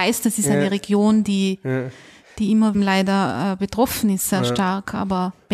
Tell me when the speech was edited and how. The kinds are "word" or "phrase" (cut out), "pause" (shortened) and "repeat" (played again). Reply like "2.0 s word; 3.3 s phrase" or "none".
2.7 s phrase

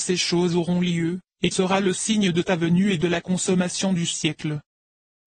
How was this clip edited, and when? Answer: 1.5 s word

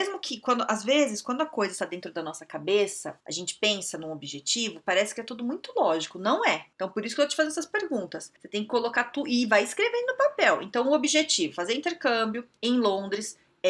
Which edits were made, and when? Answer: 3.2 s pause; 6.7 s pause; 8.4 s pause; 12.6 s pause

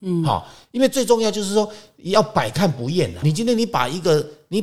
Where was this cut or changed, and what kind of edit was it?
3.2 s phrase

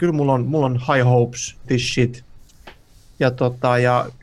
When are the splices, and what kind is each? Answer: 1.6 s word

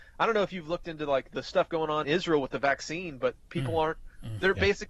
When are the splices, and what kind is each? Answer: 1.3 s word; 2.0 s word

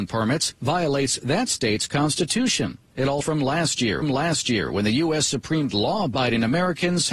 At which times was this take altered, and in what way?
3.2 s word; 4.0 s repeat; 5.7 s phrase

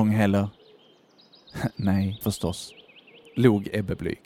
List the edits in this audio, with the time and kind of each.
2.2 s word

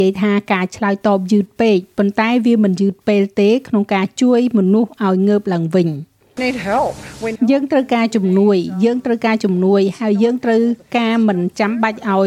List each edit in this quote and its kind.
6.4 s word; 7.4 s word

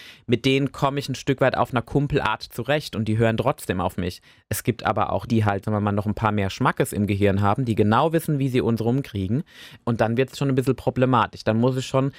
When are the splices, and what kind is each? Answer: 5.3 s word; 5.6 s word

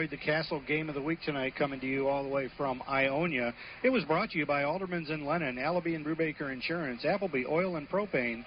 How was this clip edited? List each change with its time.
none

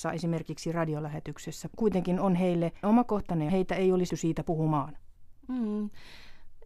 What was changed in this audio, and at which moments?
1.7 s phrase; 2.8 s word; 3.5 s phrase; 4.1 s word

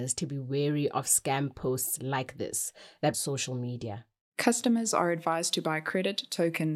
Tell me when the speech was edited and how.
3.1 s phrase

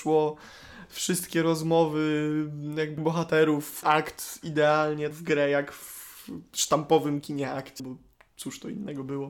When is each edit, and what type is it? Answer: 3.0 s word; 3.8 s word; 5.1 s word; 7.8 s word

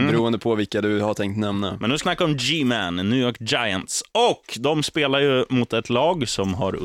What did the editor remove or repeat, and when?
2.0 s word

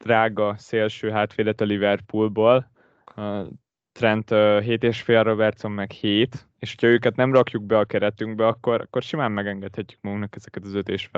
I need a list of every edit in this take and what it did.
none

